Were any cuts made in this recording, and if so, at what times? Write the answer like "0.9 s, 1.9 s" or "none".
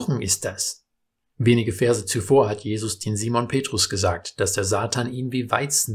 none

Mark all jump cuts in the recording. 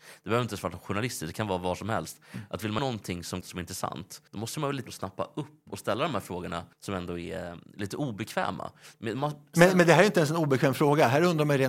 2.8 s, 3.4 s, 4.3 s, 4.9 s, 6.7 s

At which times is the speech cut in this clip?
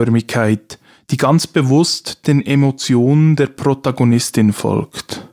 none

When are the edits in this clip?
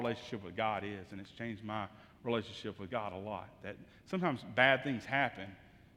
none

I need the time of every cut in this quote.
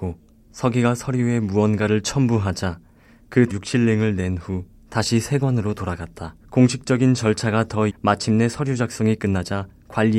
3.5 s, 6.4 s, 7.9 s

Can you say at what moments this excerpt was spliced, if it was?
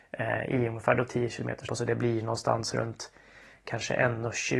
1.7 s

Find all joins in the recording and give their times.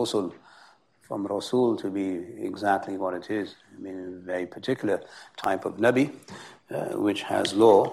none

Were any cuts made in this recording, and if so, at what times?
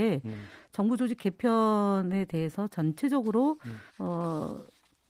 3.9 s

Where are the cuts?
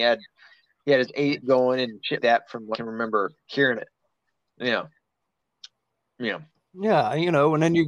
1.4 s, 2.2 s, 2.7 s, 3.8 s

